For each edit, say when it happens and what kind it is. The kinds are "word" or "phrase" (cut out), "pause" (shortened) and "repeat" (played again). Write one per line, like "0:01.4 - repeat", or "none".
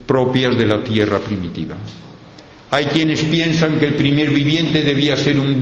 none